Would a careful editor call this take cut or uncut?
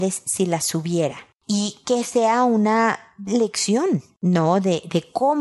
uncut